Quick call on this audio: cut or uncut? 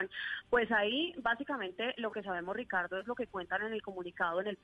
uncut